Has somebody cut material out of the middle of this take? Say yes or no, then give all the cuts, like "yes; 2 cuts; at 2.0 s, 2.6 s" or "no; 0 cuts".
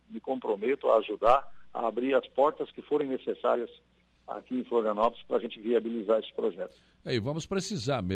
no; 0 cuts